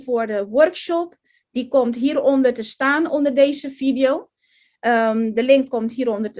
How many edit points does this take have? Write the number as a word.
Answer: zero